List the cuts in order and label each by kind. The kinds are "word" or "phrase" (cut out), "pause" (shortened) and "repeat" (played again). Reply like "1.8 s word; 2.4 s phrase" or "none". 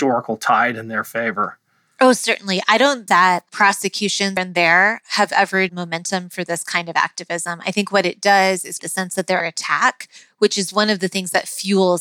3.1 s word; 4.4 s word; 5.7 s word; 8.8 s word; 9.4 s word